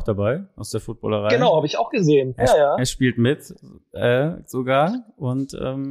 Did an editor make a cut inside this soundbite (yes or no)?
no